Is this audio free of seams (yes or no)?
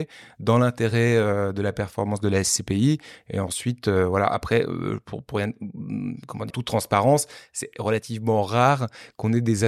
no